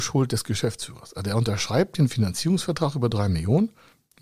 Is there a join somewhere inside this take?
no; 0 cuts

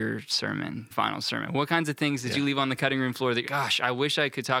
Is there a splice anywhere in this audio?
yes; 2 cuts; at 0.9 s, 3.5 s

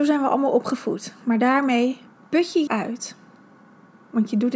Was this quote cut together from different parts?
yes; 2 cuts; at 2.1 s, 2.7 s

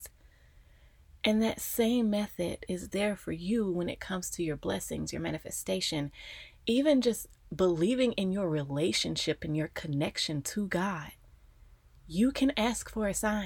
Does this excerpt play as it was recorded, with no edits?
yes; 0 cuts

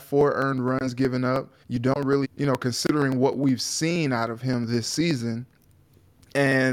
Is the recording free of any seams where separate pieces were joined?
no; 2 cuts; at 1.6 s, 2.2 s

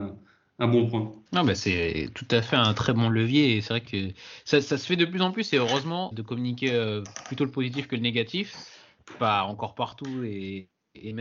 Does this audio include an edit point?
yes; 2 cuts; at 1.3 s, 6.1 s

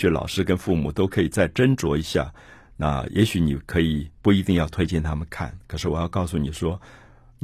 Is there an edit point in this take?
yes; 1 cut; at 4.2 s

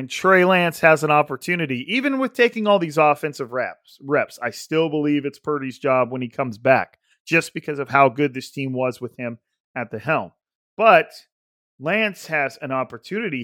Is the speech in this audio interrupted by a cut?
no; 0 cuts

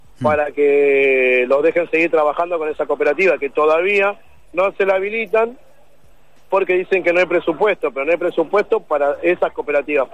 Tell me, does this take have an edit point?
no; 0 cuts

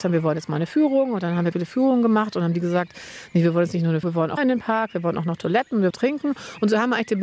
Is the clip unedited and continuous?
no; 4 cuts; at 1.5 s, 4.0 s, 4.4 s, 5.9 s

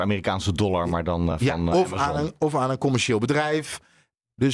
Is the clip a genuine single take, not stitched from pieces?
yes; 0 cuts

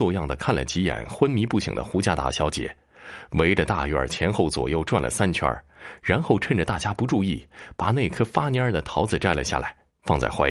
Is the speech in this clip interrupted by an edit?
no; 0 cuts

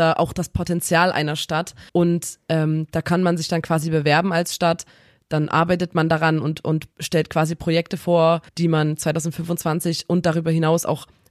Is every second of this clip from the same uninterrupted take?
no; 3 cuts; at 1.9 s, 6.9 s, 8.5 s

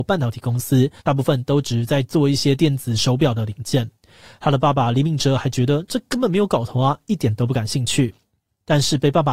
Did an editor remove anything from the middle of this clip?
yes; 1 cut; at 1.0 s

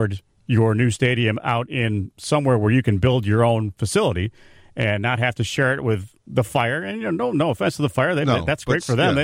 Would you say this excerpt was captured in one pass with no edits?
yes; 0 cuts

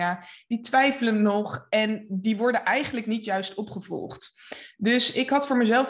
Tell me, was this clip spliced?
no; 0 cuts

